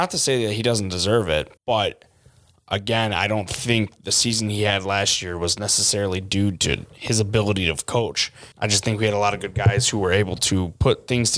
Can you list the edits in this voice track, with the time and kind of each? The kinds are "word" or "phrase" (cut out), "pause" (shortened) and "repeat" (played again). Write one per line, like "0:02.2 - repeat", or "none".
0:01.6 - pause
0:08.5 - pause